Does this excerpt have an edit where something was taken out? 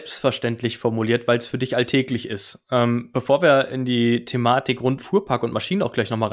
yes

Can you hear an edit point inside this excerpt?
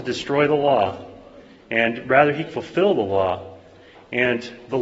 yes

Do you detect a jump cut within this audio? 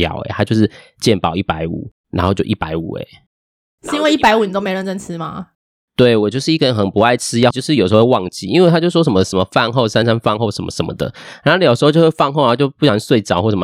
yes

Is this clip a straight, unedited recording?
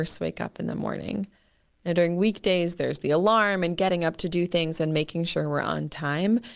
yes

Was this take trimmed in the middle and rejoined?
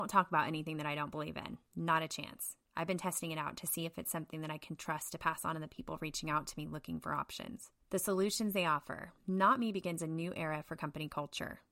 yes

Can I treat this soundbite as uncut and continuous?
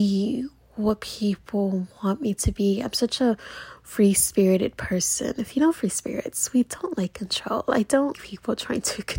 no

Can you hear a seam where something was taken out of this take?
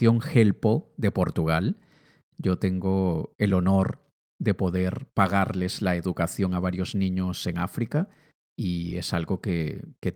no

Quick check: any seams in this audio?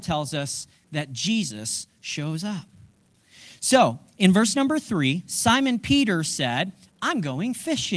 no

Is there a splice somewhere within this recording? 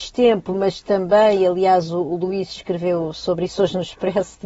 no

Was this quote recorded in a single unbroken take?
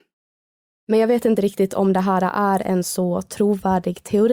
yes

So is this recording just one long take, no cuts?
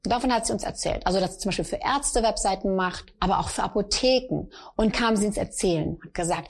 no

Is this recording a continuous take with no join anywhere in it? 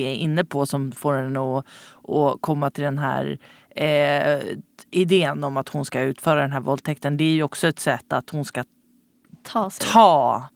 yes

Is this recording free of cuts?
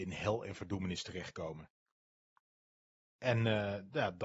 yes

